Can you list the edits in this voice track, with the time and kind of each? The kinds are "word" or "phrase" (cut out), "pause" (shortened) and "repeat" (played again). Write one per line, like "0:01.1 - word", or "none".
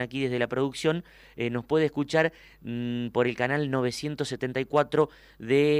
none